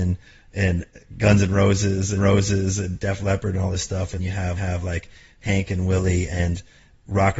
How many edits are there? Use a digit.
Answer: 3